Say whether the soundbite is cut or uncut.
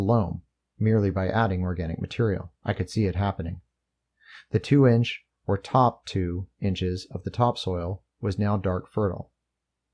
cut